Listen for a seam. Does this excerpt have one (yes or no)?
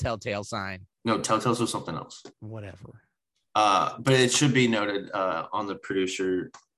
yes